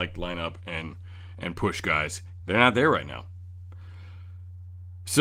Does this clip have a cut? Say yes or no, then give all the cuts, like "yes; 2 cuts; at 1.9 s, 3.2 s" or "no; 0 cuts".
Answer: yes; 1 cut; at 2.4 s